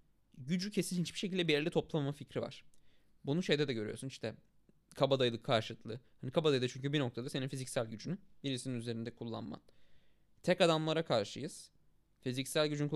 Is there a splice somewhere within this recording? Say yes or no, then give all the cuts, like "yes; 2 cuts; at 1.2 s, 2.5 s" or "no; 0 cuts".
no; 0 cuts